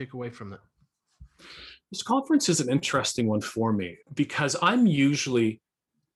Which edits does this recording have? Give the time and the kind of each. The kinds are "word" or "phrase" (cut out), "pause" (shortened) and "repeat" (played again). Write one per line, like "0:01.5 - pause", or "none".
0:04.0 - pause